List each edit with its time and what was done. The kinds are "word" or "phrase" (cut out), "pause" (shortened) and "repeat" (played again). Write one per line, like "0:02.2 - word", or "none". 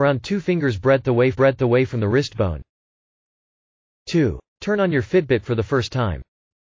0:01.3 - repeat